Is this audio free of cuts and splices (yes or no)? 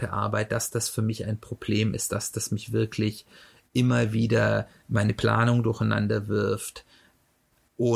yes